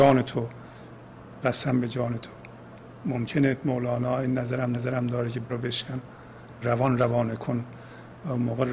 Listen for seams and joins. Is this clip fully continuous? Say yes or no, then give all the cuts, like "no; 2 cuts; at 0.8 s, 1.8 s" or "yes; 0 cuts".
no; 4 cuts; at 1.4 s, 4.7 s, 5.5 s, 6.6 s